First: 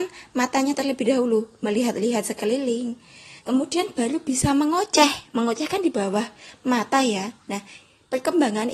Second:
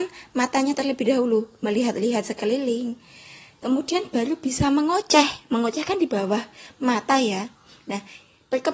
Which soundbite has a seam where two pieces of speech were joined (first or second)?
first